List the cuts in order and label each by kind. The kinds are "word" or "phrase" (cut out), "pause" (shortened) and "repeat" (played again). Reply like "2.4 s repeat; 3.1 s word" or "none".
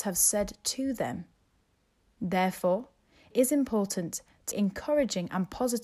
3.3 s word; 4.5 s word